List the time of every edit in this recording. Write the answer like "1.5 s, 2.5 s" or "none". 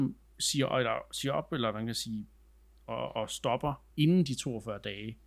3.9 s